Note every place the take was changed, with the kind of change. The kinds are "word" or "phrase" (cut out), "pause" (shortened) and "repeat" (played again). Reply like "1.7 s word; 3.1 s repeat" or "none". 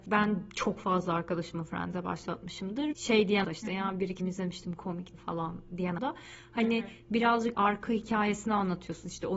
2.9 s word; 3.4 s word; 4.2 s word; 5.1 s word; 6.0 s word; 7.5 s word